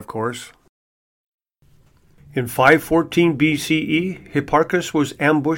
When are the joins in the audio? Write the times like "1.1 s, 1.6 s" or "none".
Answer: none